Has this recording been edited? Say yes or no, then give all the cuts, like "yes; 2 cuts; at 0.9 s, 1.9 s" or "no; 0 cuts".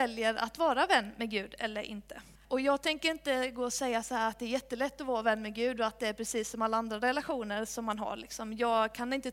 yes; 1 cut; at 2.4 s